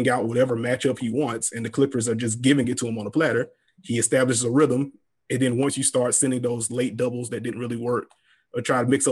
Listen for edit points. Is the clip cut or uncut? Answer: uncut